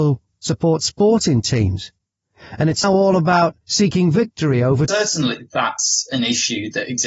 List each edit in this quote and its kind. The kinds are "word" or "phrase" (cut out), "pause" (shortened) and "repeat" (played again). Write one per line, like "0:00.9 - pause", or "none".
0:02.8 - word
0:03.6 - pause
0:04.9 - phrase